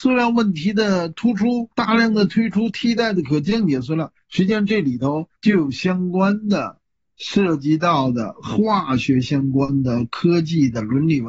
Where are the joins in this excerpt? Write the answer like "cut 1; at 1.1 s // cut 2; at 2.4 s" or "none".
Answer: cut 1; at 1.7 s // cut 2; at 5.4 s